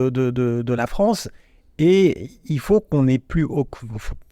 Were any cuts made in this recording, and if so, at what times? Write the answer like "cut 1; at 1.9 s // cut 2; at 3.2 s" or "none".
none